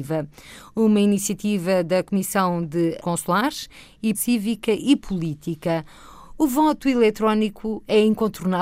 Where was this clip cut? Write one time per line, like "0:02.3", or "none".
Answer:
0:03.0
0:04.1